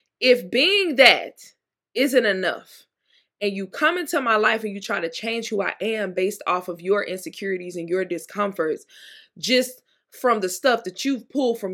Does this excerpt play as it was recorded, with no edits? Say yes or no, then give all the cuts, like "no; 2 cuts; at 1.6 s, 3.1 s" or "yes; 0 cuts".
yes; 0 cuts